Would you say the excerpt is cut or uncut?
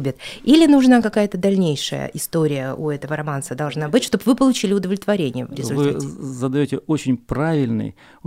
uncut